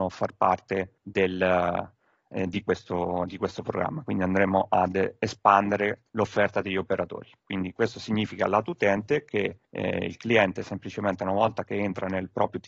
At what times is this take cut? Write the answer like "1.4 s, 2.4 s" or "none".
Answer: 1.0 s, 6.1 s, 9.6 s